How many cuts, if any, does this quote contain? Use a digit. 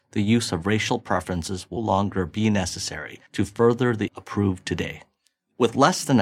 3